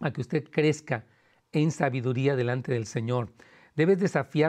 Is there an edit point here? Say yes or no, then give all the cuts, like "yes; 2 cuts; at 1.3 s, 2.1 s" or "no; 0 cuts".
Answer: no; 0 cuts